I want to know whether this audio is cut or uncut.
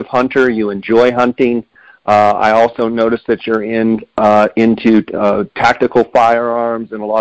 uncut